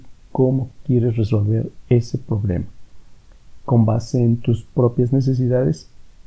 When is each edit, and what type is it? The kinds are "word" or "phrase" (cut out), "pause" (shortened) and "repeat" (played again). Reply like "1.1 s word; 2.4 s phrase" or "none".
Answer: none